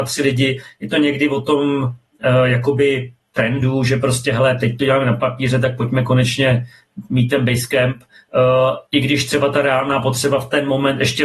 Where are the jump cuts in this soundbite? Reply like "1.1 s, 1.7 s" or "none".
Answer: 8.9 s